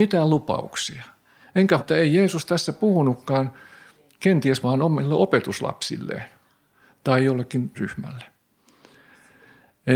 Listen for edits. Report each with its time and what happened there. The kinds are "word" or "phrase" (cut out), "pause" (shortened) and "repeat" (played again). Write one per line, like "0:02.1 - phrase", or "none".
0:01.8 - word
0:04.6 - word
0:07.7 - word